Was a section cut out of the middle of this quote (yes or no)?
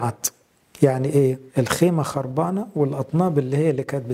yes